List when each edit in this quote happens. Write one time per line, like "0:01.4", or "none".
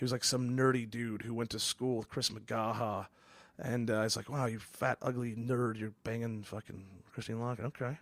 none